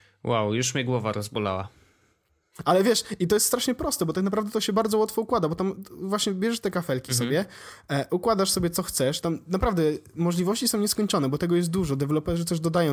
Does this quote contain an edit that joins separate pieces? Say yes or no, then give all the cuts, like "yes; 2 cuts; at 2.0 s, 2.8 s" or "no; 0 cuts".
no; 0 cuts